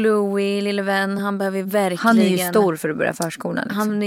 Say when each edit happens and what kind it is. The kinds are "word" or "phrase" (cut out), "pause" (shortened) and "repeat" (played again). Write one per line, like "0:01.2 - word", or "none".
none

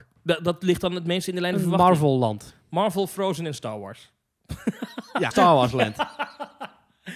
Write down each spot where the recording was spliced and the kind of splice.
0:05.3 - phrase

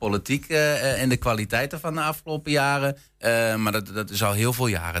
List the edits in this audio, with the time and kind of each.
0:01.0 - word
0:03.1 - pause

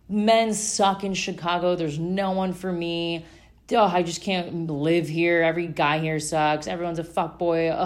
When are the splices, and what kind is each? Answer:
none

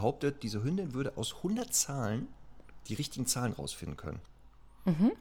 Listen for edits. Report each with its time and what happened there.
none

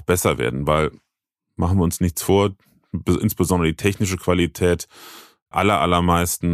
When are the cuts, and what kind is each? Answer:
0:05.5 - word

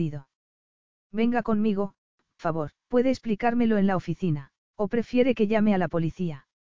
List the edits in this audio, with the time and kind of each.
0:02.4 - word
0:02.8 - pause
0:04.6 - pause

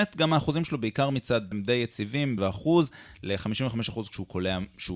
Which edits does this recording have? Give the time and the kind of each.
0:01.5 - word
0:02.4 - word

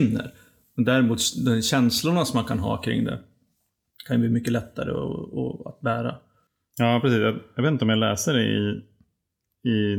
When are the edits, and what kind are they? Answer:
none

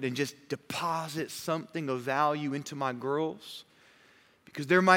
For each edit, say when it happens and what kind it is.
none

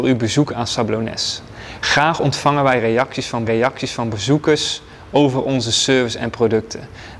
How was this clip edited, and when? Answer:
0:03.5 - repeat

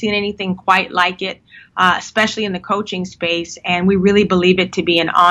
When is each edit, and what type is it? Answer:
none

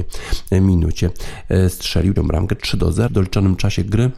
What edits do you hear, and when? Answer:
0:02.2 - word
0:03.1 - word

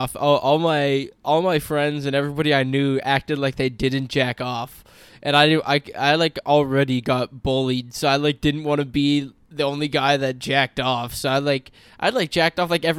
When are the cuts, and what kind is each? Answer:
none

